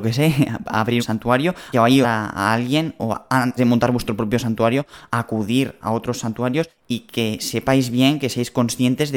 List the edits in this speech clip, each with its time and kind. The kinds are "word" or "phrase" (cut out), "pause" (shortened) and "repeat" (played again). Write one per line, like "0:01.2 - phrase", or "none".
0:01.0 - word
0:01.7 - word
0:02.0 - phrase
0:03.6 - word
0:05.8 - word
0:06.8 - pause

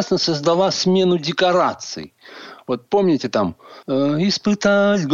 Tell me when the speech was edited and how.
0:03.8 - pause

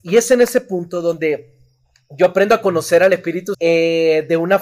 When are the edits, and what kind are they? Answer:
0:03.5 - word

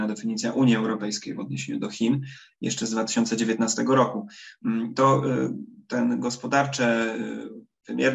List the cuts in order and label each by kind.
none

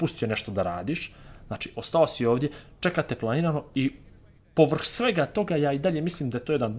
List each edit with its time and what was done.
none

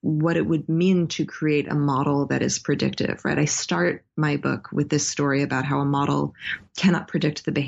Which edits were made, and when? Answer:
none

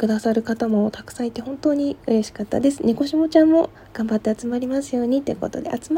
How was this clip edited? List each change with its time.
none

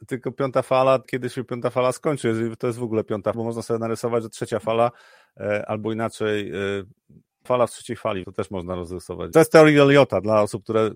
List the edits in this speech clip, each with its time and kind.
0:01.0 - word
0:03.3 - word
0:04.3 - word
0:07.5 - word
0:08.2 - word
0:09.3 - word

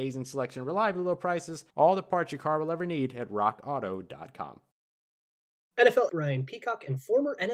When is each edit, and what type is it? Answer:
0:01.7 - pause
0:06.1 - word

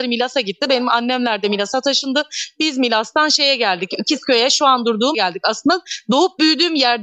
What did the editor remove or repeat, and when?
0:05.1 - word

